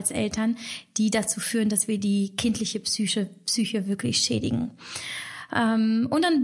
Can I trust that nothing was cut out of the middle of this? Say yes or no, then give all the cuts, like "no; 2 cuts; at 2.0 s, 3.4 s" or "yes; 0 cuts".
yes; 0 cuts